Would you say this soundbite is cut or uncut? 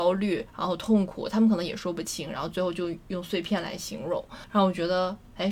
uncut